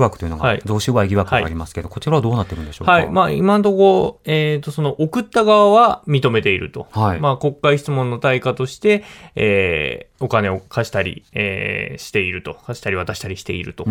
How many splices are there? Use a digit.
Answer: 1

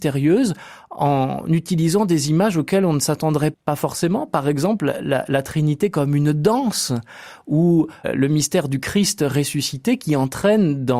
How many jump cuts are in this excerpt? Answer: 1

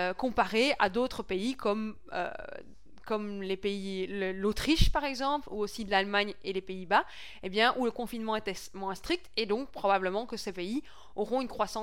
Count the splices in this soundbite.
0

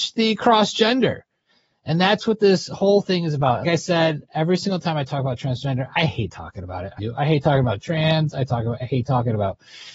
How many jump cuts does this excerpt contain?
2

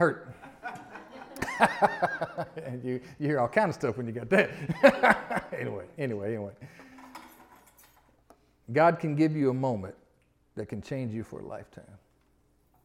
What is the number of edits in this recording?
0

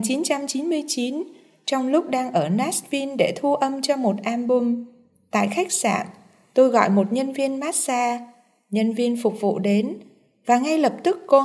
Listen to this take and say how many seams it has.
0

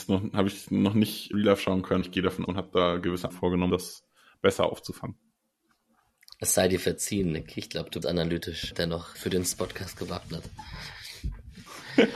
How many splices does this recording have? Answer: 8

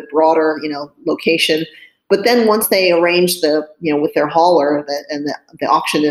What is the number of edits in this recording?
0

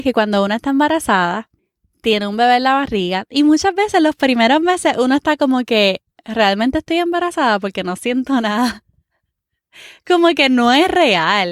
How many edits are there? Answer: 1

